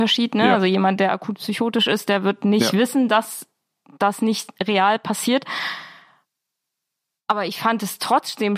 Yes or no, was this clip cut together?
no